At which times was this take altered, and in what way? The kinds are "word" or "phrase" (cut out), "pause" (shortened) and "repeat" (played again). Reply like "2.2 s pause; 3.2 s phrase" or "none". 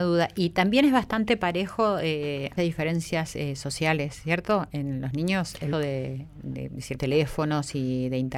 2.6 s phrase; 5.7 s word; 7.0 s phrase